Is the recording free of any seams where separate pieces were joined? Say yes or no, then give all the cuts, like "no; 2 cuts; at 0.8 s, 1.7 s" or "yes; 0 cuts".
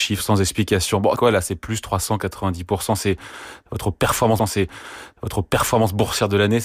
no; 2 cuts; at 1.2 s, 4.4 s